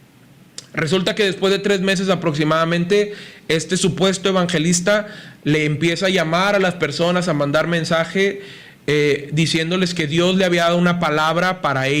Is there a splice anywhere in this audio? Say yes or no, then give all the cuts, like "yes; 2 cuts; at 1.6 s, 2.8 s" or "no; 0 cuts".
no; 0 cuts